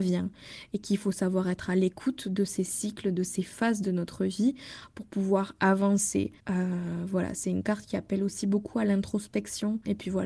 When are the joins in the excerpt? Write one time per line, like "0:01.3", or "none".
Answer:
0:06.4